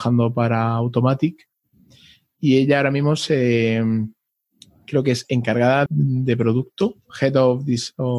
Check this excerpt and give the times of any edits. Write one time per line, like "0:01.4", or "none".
0:05.9